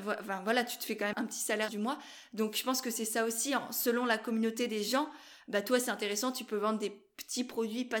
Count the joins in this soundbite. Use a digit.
2